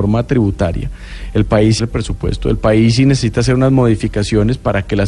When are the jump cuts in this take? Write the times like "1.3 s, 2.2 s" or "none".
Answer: 1.8 s

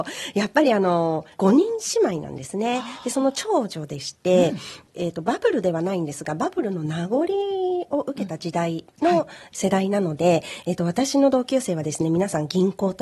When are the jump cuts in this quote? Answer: 1.3 s

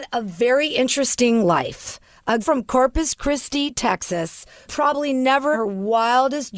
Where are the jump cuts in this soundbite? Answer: 2.4 s, 4.7 s, 5.5 s

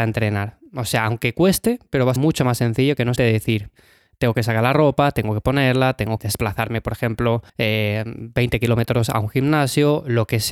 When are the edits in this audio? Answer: 2.2 s, 3.2 s, 6.2 s, 7.5 s

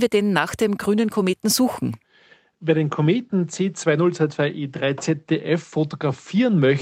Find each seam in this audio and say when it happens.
none

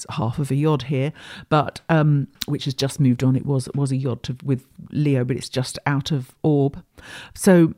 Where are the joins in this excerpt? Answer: 2.4 s

